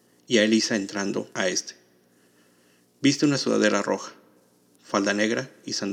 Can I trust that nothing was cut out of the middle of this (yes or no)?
yes